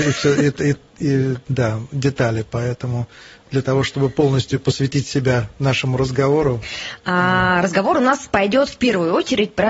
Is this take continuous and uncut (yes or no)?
yes